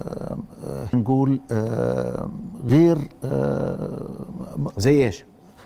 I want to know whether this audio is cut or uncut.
cut